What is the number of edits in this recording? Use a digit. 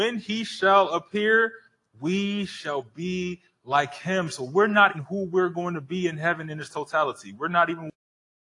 1